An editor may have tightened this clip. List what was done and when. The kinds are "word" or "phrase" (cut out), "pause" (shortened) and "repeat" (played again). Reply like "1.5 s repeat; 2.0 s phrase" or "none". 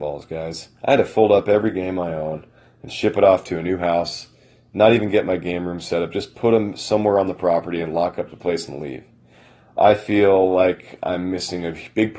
none